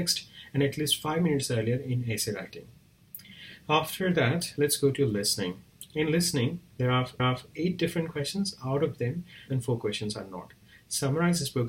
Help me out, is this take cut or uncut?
cut